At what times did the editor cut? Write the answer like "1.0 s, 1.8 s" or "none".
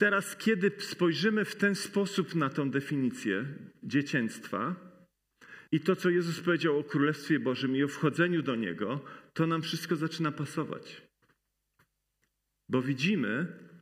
5.7 s